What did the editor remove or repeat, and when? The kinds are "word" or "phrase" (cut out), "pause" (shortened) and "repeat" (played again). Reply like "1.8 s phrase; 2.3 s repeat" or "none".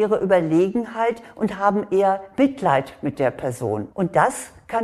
3.9 s pause